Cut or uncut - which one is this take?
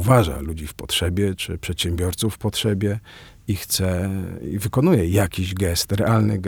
uncut